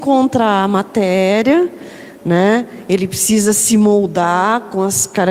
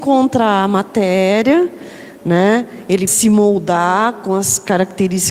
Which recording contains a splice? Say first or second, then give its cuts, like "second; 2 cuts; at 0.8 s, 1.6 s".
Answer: second; 1 cut; at 3.1 s